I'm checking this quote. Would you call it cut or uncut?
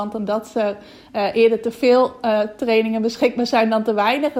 uncut